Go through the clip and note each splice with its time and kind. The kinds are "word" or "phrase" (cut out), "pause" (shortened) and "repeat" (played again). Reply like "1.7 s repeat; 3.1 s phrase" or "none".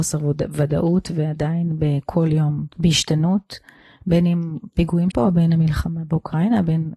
2.7 s pause; 5.1 s word